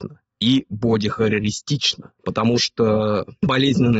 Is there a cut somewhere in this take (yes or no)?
yes